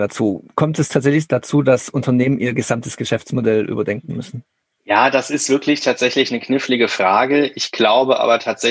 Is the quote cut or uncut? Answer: uncut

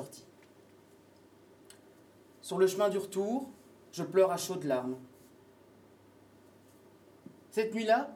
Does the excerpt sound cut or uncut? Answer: uncut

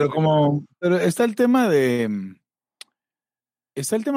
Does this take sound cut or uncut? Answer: uncut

